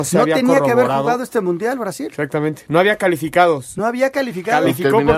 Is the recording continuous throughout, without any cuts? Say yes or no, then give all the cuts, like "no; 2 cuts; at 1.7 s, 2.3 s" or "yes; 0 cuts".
yes; 0 cuts